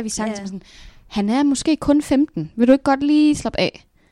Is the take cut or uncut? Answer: uncut